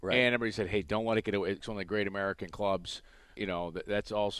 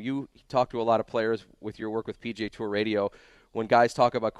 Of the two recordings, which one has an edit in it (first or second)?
first